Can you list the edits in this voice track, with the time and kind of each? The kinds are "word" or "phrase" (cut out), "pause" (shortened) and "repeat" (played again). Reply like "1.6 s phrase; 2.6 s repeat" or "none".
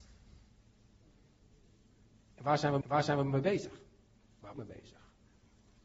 2.8 s repeat; 4.5 s phrase